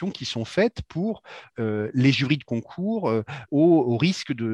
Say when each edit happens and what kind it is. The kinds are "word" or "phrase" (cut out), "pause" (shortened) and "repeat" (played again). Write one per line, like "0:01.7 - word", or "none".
0:01.5 - word
0:03.5 - word